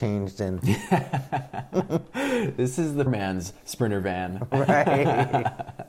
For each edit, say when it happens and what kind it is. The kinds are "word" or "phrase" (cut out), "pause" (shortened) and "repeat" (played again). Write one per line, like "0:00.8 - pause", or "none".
0:03.1 - word